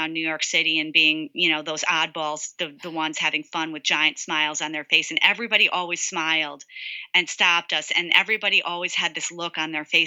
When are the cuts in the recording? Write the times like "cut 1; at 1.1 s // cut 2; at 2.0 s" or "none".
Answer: none